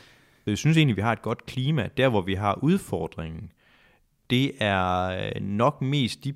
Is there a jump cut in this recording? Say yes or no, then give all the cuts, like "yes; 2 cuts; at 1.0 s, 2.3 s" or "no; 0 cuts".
no; 0 cuts